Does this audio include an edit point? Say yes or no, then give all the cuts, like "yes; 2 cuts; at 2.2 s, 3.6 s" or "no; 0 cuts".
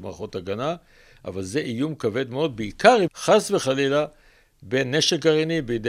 yes; 1 cut; at 3.1 s